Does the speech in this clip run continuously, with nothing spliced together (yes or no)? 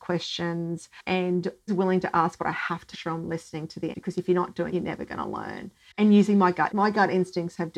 no